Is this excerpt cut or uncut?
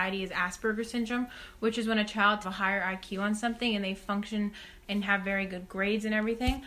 cut